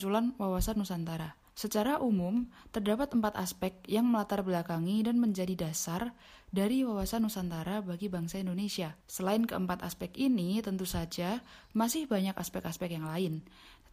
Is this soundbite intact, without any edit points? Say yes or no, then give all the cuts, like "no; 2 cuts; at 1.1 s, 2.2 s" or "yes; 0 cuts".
no; 2 cuts; at 1.5 s, 9.0 s